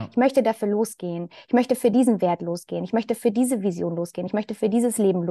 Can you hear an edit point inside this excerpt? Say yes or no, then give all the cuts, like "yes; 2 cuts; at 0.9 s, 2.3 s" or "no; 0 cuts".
no; 0 cuts